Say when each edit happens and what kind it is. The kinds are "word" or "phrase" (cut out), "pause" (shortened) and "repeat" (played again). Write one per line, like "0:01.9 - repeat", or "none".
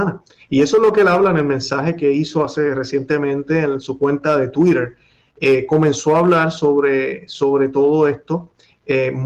none